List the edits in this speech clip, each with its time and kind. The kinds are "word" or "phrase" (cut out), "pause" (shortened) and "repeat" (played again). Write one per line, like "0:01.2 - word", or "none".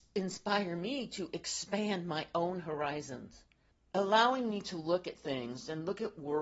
0:03.7 - pause